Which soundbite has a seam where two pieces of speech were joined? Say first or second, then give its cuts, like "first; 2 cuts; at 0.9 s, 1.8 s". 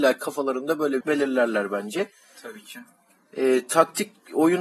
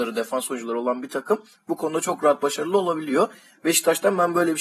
first; 1 cut; at 1.0 s